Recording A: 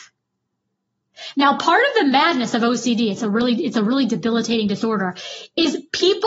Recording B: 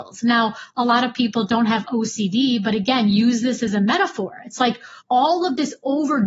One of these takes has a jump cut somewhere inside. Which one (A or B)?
B